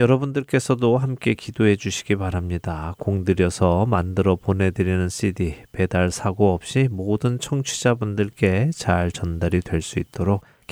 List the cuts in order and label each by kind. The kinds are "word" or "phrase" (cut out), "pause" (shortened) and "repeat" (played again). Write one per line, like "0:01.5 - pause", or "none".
none